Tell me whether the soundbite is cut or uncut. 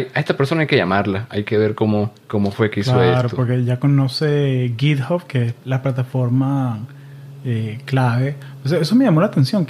cut